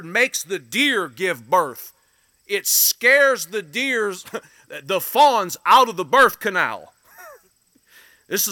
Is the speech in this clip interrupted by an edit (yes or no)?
no